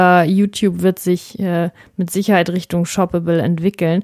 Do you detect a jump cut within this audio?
no; 0 cuts

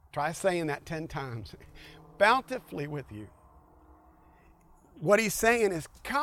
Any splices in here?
no; 0 cuts

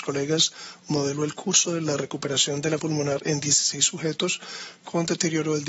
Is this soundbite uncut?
no; 1 cut; at 2.8 s

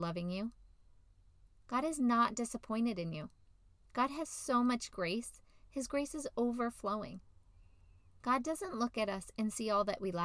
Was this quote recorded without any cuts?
yes; 0 cuts

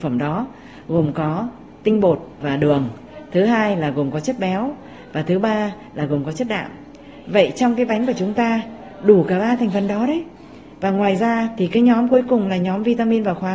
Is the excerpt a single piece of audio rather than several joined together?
yes; 0 cuts

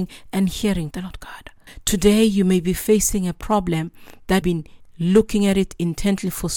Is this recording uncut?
no; 2 cuts; at 0.9 s, 4.4 s

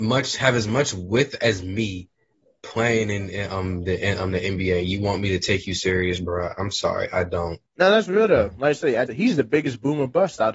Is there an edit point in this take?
yes; 2 cuts; at 7.7 s, 9.1 s

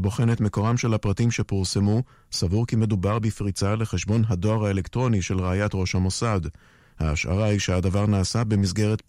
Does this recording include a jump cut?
no; 0 cuts

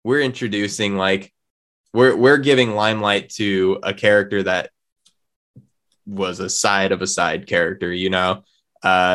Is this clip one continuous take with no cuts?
yes; 0 cuts

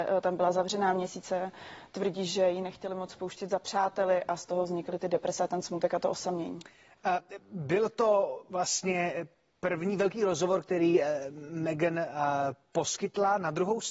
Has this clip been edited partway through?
no; 0 cuts

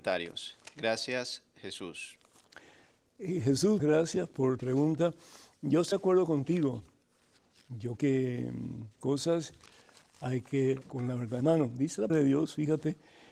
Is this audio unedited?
no; 8 cuts; at 3.8 s, 4.6 s, 5.9 s, 8.0 s, 9.0 s, 10.8 s, 11.4 s, 12.1 s

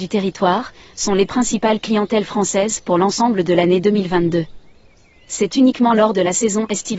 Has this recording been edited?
no; 0 cuts

